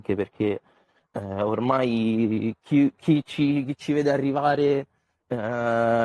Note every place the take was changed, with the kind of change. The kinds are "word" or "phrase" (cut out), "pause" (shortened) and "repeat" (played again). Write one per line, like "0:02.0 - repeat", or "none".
none